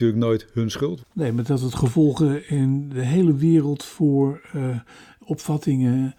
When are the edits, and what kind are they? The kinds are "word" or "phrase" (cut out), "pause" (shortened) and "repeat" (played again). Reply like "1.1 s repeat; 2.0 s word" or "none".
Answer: none